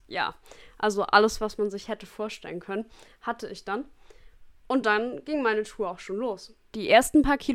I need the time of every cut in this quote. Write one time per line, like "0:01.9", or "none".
none